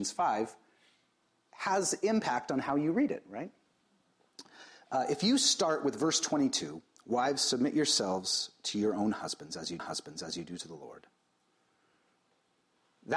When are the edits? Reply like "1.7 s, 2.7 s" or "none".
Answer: 9.8 s